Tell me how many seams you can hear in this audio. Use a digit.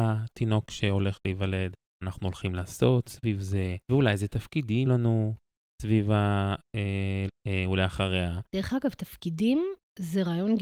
5